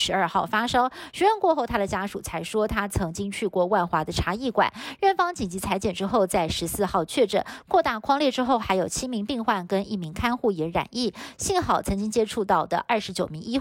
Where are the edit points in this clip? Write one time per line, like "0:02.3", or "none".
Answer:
none